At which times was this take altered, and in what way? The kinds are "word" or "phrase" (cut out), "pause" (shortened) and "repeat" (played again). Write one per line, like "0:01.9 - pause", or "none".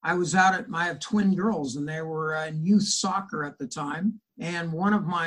0:04.3 - pause